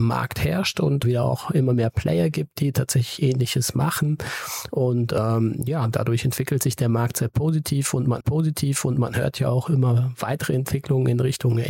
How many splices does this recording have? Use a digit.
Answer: 2